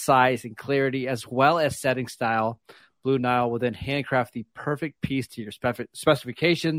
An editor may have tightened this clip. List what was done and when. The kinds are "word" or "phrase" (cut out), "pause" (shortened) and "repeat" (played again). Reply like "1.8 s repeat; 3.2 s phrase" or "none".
none